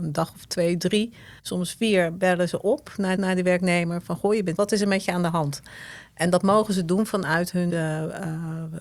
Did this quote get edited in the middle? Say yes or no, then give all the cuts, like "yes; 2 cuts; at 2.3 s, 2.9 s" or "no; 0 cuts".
yes; 4 cuts; at 1.4 s, 3.2 s, 4.6 s, 7.7 s